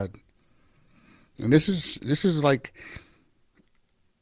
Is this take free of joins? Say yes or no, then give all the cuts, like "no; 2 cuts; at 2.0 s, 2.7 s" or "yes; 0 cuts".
yes; 0 cuts